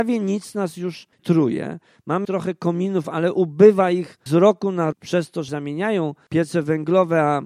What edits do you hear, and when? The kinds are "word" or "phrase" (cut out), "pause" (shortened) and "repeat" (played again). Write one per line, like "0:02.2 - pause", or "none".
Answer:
0:01.2 - word
0:02.2 - word
0:04.3 - word
0:04.9 - word
0:05.5 - word